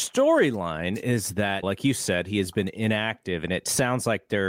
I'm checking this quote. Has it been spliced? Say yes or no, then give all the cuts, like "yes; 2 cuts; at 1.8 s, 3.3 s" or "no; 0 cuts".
yes; 1 cut; at 1.6 s